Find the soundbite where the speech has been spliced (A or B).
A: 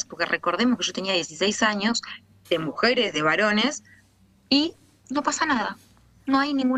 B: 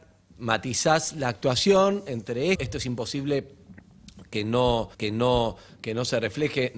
B